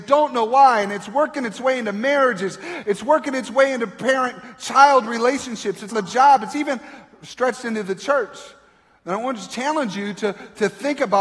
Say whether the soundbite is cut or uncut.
cut